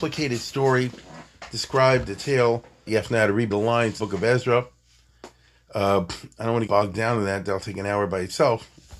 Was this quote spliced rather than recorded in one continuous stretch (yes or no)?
yes